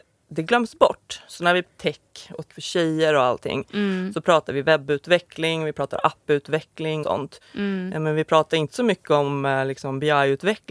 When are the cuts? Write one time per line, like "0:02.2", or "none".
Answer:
0:01.6
0:02.5
0:07.0